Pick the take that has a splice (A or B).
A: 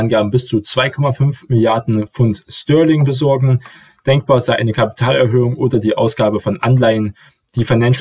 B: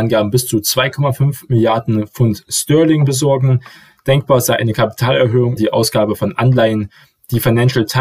B